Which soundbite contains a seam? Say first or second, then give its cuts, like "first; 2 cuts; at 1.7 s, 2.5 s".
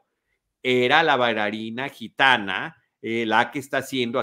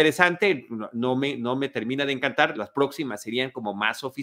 second; 1 cut; at 2.5 s